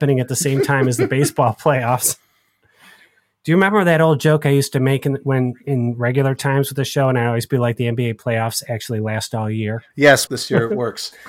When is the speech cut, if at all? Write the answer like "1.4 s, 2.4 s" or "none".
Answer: 10.3 s